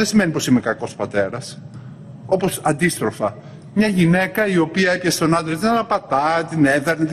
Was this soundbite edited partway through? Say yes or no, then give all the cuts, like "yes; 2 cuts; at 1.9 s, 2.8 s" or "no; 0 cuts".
no; 0 cuts